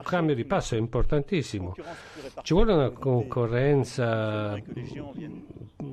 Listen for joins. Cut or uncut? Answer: uncut